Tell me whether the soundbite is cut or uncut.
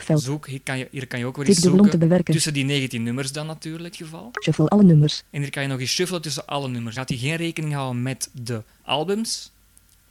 cut